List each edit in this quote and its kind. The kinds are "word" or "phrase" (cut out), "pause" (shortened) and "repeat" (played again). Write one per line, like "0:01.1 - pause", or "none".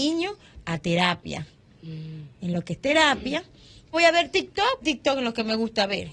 0:02.8 - word
0:03.9 - word
0:04.8 - word